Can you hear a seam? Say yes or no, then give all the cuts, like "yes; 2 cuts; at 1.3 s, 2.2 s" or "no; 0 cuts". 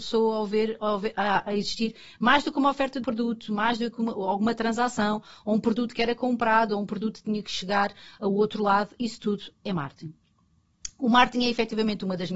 yes; 1 cut; at 3.0 s